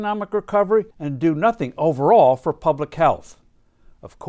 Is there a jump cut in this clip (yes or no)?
yes